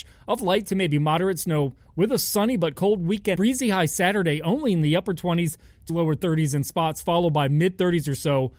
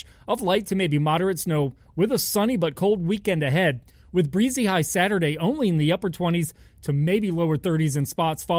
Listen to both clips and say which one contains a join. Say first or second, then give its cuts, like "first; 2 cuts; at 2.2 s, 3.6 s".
first; 2 cuts; at 3.4 s, 5.9 s